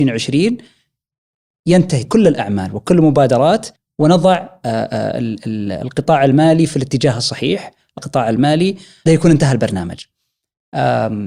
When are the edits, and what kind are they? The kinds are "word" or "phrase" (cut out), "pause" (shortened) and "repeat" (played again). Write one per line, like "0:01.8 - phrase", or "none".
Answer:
0:02.0 - word
0:03.8 - pause
0:08.0 - phrase
0:09.1 - word